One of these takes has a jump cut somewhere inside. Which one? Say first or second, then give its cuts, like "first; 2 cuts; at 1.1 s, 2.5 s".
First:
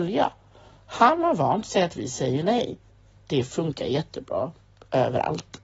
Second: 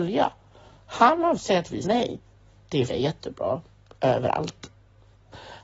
second; 3 cuts; at 1.4 s, 1.8 s, 2.9 s